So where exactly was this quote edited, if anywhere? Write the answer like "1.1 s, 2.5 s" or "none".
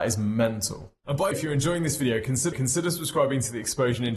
1.3 s, 2.5 s